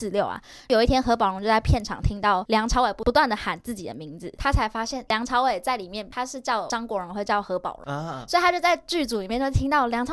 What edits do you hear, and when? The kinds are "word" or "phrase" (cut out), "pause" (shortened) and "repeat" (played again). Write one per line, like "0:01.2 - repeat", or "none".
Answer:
0:05.1 - word